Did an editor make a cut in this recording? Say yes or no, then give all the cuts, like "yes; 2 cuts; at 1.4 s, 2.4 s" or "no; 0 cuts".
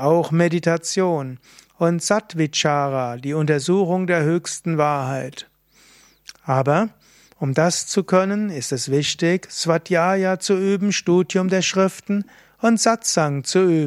no; 0 cuts